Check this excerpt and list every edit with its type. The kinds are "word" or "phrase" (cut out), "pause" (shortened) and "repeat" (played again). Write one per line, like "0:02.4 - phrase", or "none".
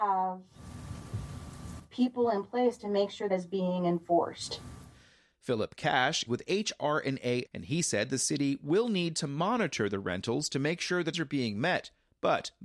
0:03.3 - word
0:06.3 - word
0:07.5 - word
0:11.1 - word